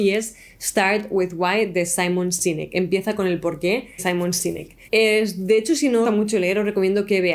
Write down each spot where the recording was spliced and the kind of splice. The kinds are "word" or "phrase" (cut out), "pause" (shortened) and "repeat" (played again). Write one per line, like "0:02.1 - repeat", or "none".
0:04.0 - word
0:04.9 - pause
0:06.0 - phrase